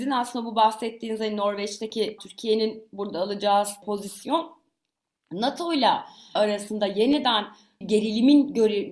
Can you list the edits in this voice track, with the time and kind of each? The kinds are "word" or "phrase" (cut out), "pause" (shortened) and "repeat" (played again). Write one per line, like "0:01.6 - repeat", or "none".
0:02.2 - word
0:03.8 - word
0:06.4 - word
0:07.8 - word